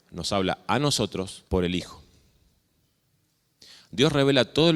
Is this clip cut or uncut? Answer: cut